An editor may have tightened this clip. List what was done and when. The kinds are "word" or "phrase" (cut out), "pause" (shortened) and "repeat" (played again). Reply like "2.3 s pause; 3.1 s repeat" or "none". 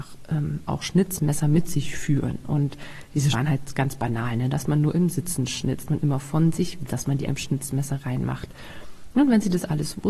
3.3 s word; 5.9 s word; 6.9 s word; 7.3 s word; 8.0 s word